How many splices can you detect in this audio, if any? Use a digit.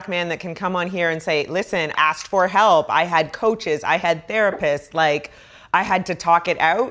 1